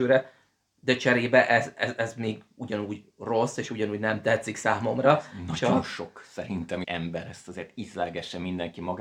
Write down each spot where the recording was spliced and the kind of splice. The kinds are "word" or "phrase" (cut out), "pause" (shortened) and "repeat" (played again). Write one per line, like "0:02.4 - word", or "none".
0:06.8 - phrase